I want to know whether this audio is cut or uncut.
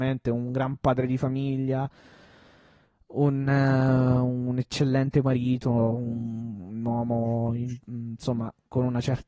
cut